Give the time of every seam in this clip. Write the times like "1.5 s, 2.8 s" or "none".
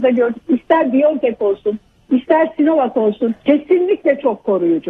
3.4 s